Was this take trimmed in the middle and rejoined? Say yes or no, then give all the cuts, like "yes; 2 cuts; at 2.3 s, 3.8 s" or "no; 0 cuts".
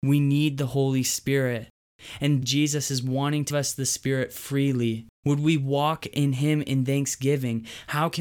yes; 3 cuts; at 2.4 s, 3.5 s, 5.1 s